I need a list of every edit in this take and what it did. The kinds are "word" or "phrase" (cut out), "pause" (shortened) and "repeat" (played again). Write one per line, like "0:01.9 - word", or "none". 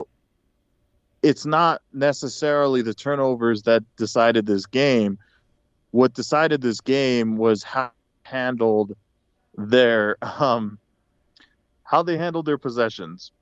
none